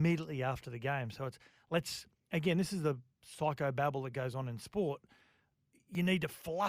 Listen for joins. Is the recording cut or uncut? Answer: uncut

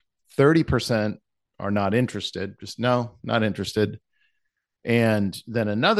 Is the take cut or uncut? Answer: uncut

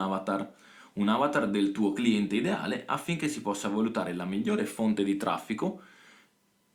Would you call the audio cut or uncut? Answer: uncut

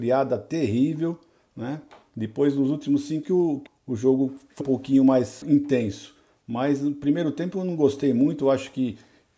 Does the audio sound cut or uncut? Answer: cut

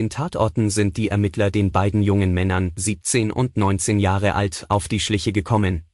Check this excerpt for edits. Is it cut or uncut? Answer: uncut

